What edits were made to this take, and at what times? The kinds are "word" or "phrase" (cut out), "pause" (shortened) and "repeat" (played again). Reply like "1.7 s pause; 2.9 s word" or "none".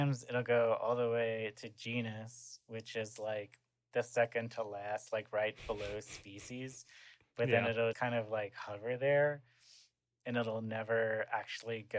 7.9 s word